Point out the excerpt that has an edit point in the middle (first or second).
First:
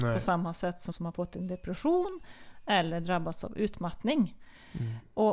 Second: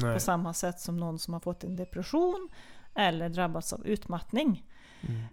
first